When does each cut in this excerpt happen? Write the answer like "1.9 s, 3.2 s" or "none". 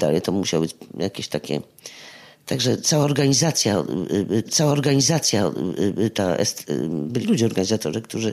4.5 s, 7.2 s

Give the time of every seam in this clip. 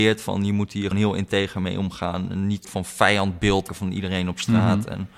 0.9 s, 2.6 s, 3.7 s

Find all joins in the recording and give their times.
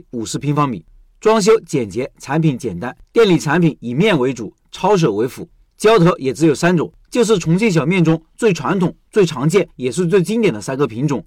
3.0 s, 4.6 s, 9.7 s

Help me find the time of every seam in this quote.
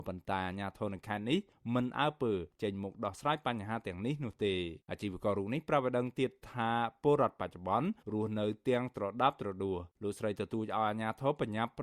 4.8 s, 8.0 s, 9.9 s

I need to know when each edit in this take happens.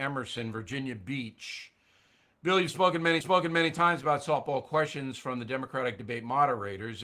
3.2 s

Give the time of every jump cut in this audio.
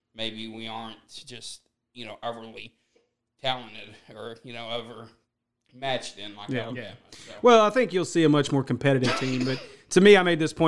none

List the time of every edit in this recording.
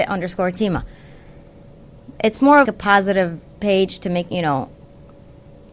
2.7 s, 4.3 s

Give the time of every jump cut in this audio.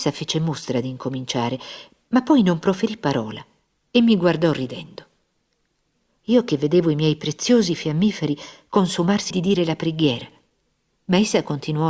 9.3 s

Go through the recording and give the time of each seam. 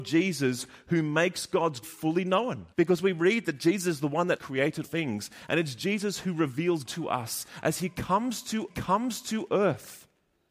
1.8 s, 2.7 s, 4.4 s, 4.8 s, 6.9 s, 8.7 s

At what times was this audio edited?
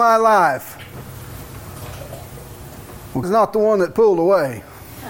3.2 s

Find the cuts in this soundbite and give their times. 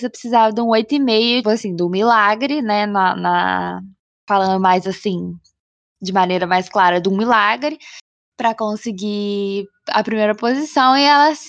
1.4 s

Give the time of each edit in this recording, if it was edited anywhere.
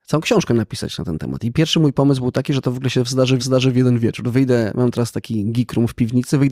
3.4 s

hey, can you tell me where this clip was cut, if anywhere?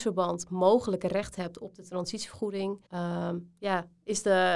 2.9 s

